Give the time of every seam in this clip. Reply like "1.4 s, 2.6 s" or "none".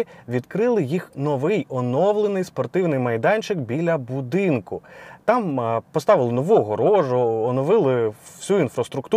none

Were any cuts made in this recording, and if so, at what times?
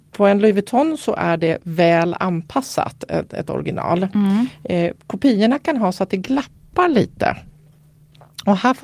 none

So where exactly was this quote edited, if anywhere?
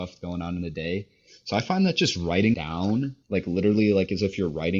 2.5 s, 3.2 s

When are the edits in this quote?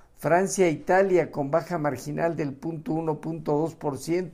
none

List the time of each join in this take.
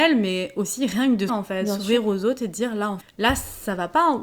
1.3 s, 3.0 s

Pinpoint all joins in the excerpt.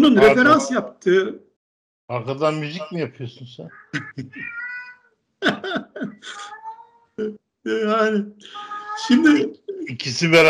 1.6 s, 7.4 s

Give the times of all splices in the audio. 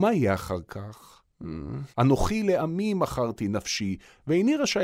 1.3 s, 1.9 s

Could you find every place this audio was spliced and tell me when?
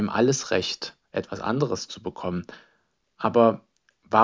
none

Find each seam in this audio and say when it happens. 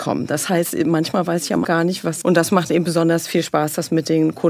1.6 s, 2.2 s

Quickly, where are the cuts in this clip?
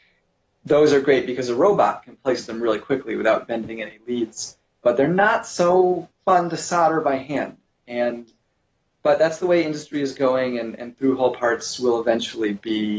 none

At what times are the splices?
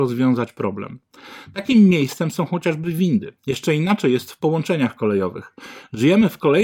3.4 s

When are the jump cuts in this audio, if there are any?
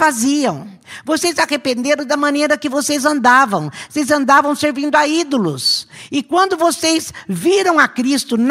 none

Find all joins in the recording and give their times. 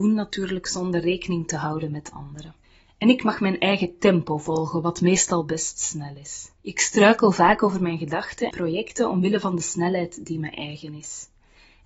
2.6 s, 6.6 s, 8.5 s

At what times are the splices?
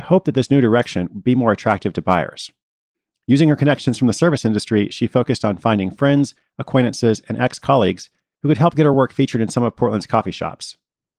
none

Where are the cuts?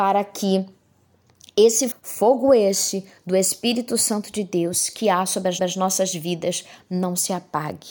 1.9 s, 5.6 s

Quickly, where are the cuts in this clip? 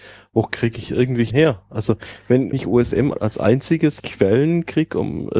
1.3 s, 2.5 s, 3.1 s, 4.0 s

